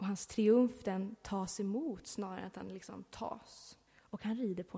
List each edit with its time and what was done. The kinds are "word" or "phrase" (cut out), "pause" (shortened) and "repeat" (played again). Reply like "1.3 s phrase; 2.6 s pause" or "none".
3.9 s pause

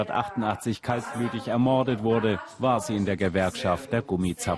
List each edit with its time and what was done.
none

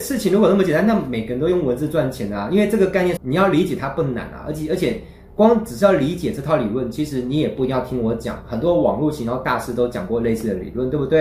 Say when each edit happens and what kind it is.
3.2 s phrase

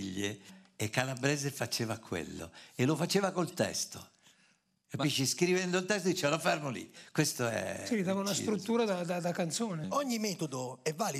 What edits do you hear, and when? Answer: none

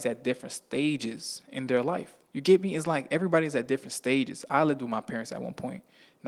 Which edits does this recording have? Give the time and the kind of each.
2.2 s pause

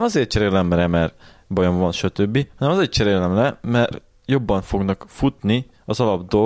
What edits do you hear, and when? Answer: none

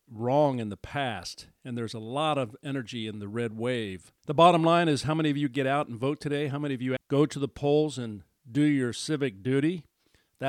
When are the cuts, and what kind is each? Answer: 4.2 s pause; 7.0 s word

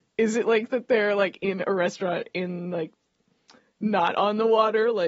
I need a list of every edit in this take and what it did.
none

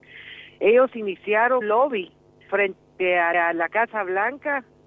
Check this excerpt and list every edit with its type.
1.6 s word; 3.3 s repeat

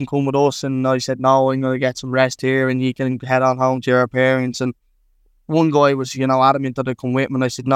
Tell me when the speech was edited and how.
none

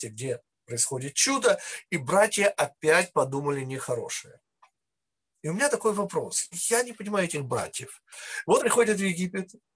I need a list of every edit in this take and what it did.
8.6 s word

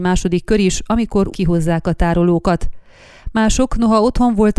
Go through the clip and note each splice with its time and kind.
1.3 s word

